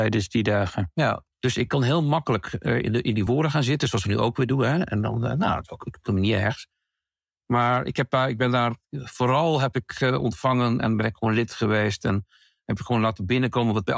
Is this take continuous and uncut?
yes; 0 cuts

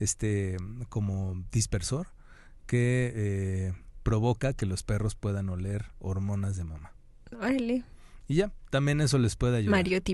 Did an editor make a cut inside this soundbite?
no; 0 cuts

